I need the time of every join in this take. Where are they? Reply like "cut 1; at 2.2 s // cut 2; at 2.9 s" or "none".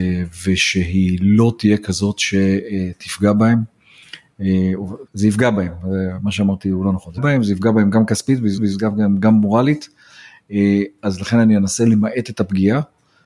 cut 1; at 5.1 s // cut 2; at 7.2 s // cut 3; at 8.6 s